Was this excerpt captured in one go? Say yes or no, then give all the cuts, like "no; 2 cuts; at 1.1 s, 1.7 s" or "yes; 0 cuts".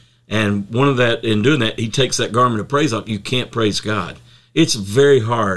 yes; 0 cuts